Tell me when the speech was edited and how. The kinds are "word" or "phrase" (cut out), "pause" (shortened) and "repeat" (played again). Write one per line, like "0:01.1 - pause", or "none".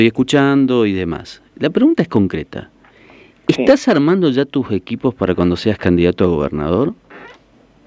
none